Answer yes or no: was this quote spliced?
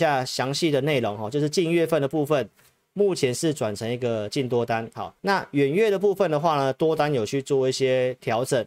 yes